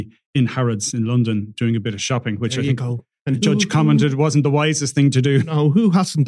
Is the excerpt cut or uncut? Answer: uncut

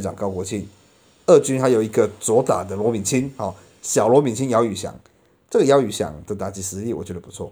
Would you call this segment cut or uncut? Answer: uncut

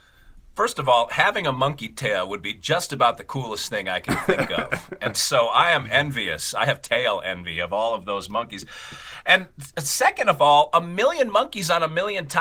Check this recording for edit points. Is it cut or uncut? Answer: uncut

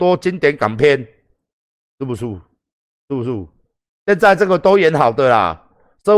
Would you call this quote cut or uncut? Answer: uncut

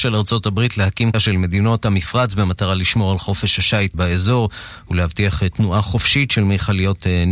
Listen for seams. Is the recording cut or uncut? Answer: cut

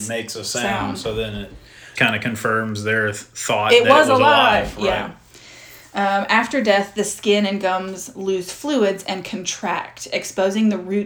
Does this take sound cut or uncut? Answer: cut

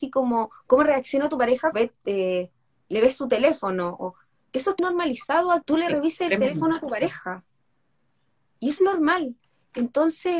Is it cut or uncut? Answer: cut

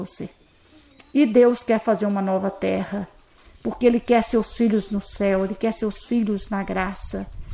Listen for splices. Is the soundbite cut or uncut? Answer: uncut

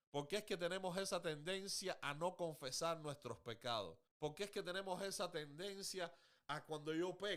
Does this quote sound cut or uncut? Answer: cut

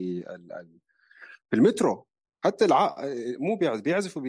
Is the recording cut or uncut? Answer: cut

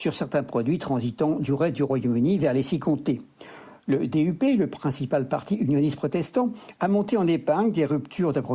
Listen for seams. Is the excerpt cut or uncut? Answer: uncut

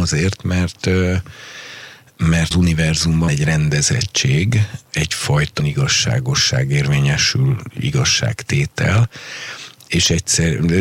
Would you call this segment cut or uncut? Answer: cut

